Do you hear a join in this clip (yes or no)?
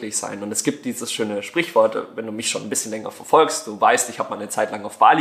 no